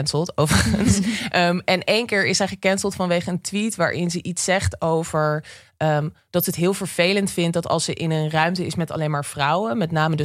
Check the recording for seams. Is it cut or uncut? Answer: uncut